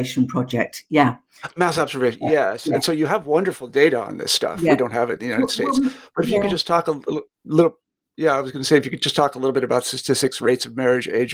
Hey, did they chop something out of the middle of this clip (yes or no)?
no